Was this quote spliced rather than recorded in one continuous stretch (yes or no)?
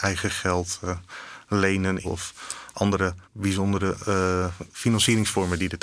yes